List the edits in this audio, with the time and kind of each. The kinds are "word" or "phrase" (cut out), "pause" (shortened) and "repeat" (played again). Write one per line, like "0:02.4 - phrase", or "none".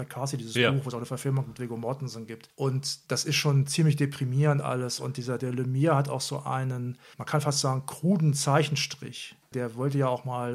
0:03.0 - pause